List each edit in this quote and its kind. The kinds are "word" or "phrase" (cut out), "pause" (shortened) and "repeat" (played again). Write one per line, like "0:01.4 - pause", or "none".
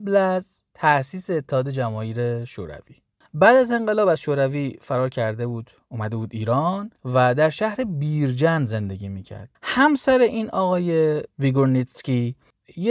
0:06.9 - pause
0:09.5 - pause